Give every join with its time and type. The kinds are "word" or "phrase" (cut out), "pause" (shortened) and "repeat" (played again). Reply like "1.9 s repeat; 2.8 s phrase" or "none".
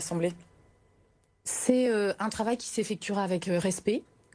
none